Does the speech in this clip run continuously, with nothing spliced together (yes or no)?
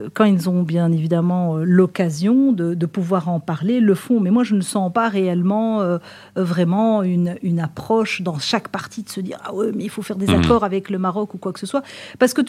yes